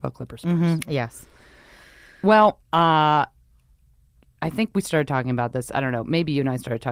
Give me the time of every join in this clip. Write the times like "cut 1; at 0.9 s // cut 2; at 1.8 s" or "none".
cut 1; at 2.6 s